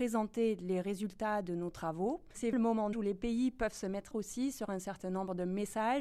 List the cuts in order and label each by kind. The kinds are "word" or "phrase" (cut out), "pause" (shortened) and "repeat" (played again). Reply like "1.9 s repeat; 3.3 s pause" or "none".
2.5 s word; 2.9 s word; 4.1 s word